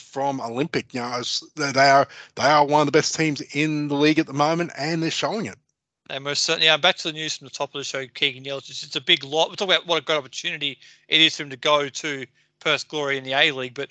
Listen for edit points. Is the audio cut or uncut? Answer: uncut